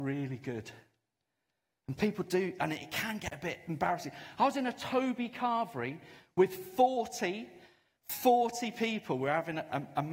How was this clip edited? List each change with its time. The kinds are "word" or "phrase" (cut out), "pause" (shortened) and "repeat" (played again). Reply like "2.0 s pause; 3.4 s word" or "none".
none